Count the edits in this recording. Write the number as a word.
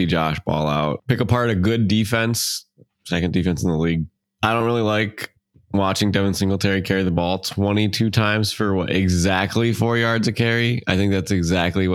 zero